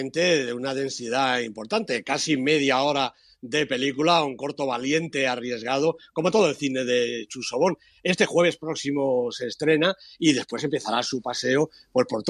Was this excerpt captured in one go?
yes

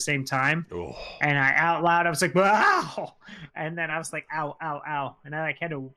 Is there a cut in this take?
no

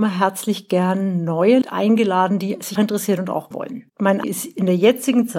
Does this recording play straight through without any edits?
no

